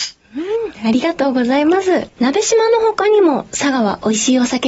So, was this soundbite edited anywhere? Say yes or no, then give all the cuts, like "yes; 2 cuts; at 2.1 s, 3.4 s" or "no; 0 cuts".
yes; 1 cut; at 2.1 s